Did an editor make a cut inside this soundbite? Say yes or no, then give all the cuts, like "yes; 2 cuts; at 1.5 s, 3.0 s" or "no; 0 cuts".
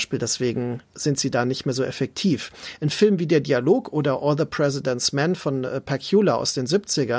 no; 0 cuts